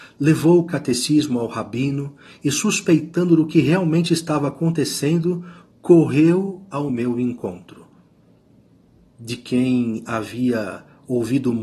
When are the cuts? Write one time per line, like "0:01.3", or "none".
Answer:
none